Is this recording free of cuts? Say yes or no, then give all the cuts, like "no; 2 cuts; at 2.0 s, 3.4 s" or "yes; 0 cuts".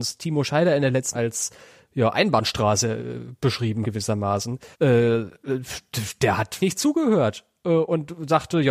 no; 4 cuts; at 1.1 s, 3.8 s, 4.7 s, 6.6 s